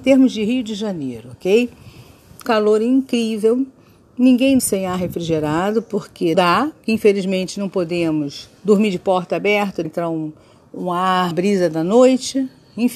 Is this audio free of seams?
no; 6 cuts; at 2.5 s, 4.6 s, 6.3 s, 8.6 s, 9.8 s, 11.3 s

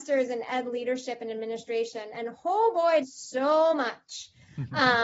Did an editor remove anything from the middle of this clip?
yes; 1 cut; at 3.0 s

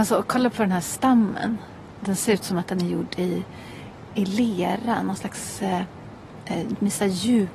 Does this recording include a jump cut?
no; 0 cuts

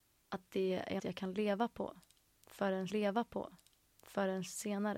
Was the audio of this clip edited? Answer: yes; 2 cuts; at 1.0 s, 2.9 s

